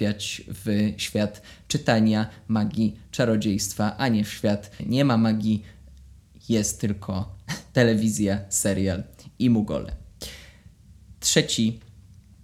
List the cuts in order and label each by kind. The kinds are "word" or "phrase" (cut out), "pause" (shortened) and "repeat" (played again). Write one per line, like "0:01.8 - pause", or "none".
0:04.8 - word